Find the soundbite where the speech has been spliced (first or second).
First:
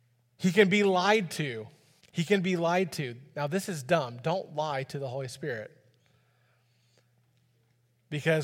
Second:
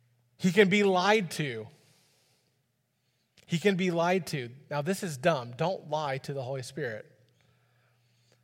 first